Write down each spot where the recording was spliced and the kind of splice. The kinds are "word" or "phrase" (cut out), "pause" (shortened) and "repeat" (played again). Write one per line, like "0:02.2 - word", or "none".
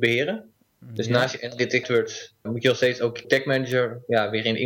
0:01.8 - word
0:02.5 - word
0:03.2 - word